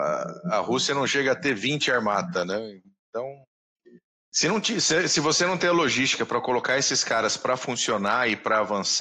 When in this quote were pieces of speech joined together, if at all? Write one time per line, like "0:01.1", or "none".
none